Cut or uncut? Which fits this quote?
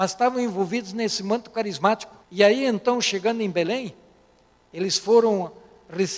cut